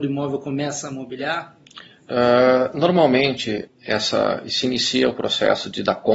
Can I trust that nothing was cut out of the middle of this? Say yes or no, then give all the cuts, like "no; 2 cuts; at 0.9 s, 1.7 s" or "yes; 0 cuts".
no; 1 cut; at 3.7 s